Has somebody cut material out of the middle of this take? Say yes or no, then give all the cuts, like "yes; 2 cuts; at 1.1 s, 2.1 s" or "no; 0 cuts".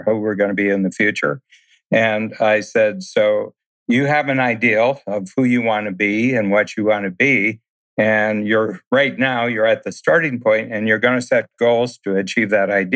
no; 0 cuts